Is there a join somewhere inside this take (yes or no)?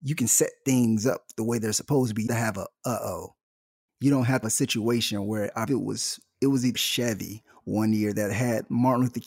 yes